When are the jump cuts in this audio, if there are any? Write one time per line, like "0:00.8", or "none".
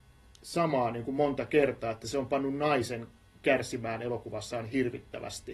none

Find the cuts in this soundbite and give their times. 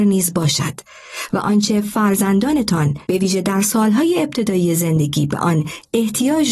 0:03.0

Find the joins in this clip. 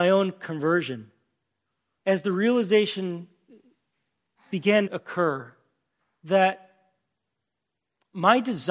0:02.0
0:04.9

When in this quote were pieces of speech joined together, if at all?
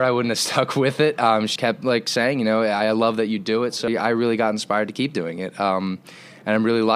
0:01.6
0:03.9

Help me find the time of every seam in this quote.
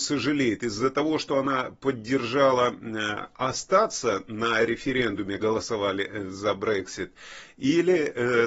0:05.4

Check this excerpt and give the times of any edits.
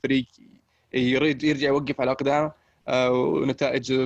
none

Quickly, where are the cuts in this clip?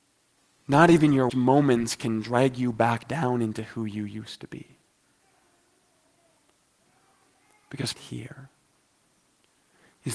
0:01.3
0:07.9

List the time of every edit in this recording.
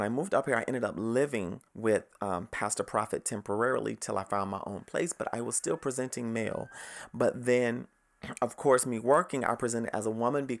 0:01.7

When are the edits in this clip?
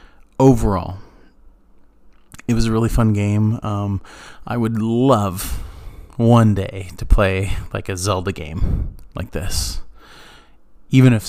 none

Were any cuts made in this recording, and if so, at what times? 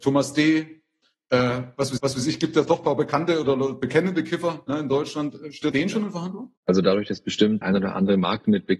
0:02.0
0:05.7
0:06.6
0:07.6

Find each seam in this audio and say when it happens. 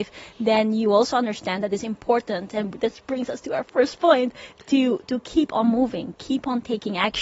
none

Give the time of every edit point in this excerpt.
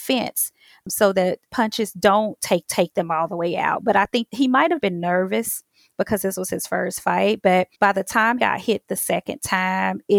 0:02.7
0:04.8
0:07.7
0:08.4

